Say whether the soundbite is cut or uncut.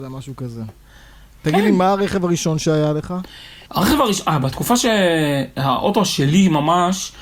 cut